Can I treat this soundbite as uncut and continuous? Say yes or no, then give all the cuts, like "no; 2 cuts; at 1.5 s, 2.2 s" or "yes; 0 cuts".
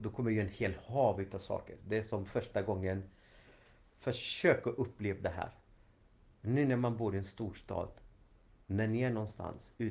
yes; 0 cuts